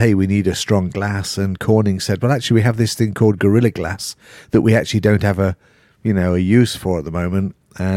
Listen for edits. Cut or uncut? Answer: uncut